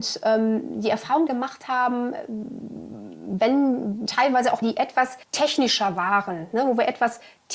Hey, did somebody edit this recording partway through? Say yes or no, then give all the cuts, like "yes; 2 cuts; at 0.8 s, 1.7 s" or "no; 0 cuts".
yes; 4 cuts; at 1.3 s, 4.1 s, 4.6 s, 5.2 s